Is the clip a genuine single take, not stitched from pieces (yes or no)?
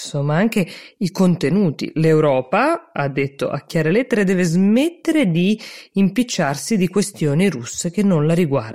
yes